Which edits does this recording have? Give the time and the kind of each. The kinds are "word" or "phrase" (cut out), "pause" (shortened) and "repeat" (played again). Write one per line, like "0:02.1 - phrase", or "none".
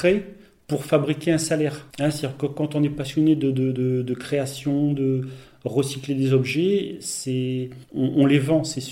0:01.9 - pause
0:07.8 - pause